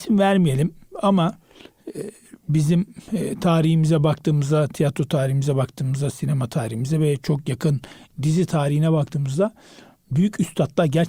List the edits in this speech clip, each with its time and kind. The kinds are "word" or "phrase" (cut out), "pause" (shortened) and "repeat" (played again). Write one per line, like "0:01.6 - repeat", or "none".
none